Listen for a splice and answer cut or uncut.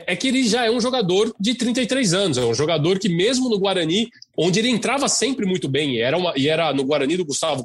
uncut